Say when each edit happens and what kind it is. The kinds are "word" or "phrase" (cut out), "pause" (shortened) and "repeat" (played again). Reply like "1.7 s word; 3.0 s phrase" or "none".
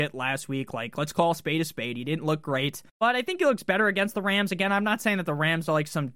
2.9 s pause